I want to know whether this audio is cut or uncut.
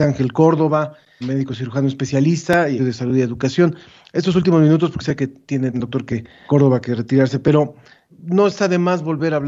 cut